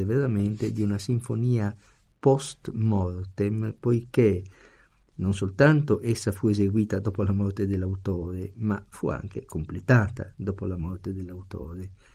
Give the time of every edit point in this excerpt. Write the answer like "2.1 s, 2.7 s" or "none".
none